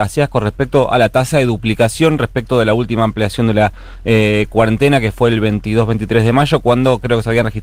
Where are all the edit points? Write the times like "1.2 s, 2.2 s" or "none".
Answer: none